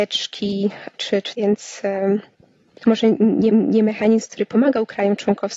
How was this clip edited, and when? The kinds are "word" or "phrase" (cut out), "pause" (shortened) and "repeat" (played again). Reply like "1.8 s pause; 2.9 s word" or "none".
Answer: 1.3 s phrase; 3.5 s repeat

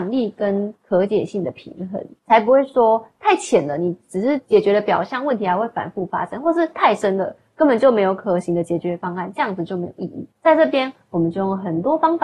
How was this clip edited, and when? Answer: 10.3 s pause

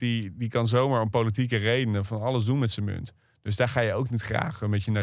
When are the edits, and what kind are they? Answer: none

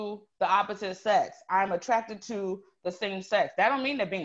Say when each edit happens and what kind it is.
none

